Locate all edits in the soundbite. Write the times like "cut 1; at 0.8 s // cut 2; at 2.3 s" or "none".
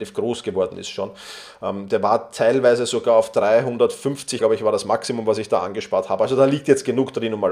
cut 1; at 4.4 s